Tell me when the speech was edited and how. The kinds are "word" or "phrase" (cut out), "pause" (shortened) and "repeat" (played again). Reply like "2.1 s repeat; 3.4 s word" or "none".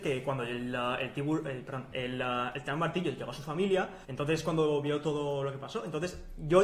4.0 s pause